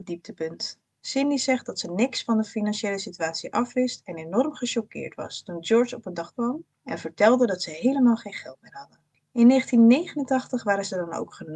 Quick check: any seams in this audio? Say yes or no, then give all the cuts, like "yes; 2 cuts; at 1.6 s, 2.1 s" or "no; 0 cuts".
yes; 1 cut; at 6.3 s